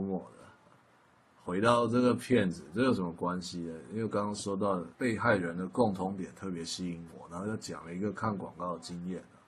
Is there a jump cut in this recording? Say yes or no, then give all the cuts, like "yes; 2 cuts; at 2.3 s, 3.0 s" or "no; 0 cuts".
yes; 1 cut; at 4.9 s